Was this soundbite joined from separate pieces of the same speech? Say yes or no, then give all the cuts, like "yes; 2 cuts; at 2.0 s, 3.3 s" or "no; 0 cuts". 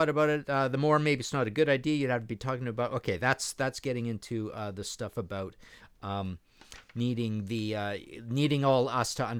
no; 0 cuts